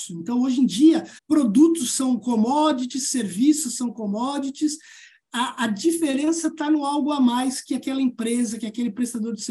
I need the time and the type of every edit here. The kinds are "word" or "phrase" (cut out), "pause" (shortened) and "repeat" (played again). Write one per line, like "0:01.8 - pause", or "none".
0:01.2 - pause

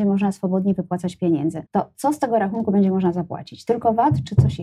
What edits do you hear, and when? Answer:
0:01.7 - pause

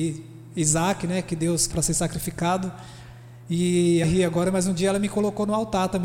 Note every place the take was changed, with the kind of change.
0:01.7 - phrase
0:04.0 - phrase

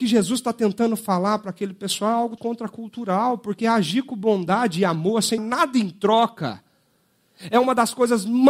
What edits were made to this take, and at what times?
0:02.4 - word
0:05.4 - word

